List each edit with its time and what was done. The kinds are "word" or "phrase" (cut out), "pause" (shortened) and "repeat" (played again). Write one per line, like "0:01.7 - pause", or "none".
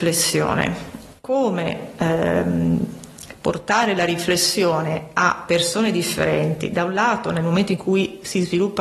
none